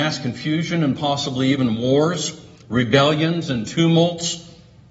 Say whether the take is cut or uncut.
uncut